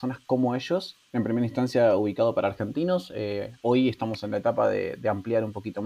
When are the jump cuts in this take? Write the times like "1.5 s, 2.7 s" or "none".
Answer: 1.1 s, 3.6 s